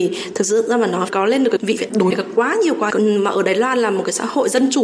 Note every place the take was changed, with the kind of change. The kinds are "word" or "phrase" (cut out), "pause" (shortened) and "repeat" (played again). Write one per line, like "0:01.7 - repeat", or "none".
0:01.8 - phrase
0:02.1 - word
0:02.9 - phrase